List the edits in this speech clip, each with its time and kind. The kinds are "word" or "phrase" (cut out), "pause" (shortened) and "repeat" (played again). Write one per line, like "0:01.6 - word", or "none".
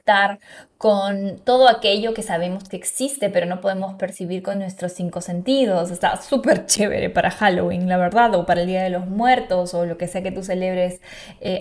none